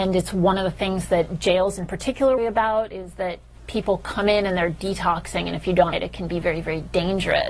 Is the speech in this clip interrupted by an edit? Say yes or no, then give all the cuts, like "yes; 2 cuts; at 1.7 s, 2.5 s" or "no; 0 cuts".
yes; 2 cuts; at 2.4 s, 5.9 s